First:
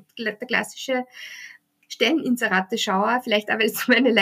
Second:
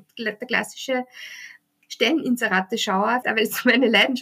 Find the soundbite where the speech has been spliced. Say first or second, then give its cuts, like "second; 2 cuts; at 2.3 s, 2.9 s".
second; 1 cut; at 3.2 s